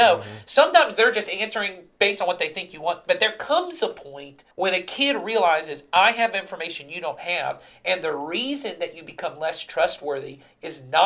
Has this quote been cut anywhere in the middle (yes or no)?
yes